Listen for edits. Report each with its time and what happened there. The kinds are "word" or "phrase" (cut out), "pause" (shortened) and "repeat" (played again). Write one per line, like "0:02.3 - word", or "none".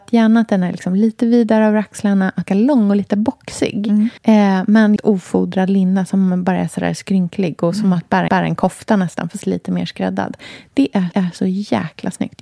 0:02.5 - phrase
0:04.2 - pause
0:05.0 - word
0:08.3 - repeat
0:09.4 - word
0:11.1 - repeat